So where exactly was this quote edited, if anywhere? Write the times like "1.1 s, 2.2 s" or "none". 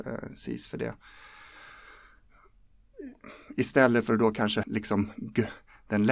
4.6 s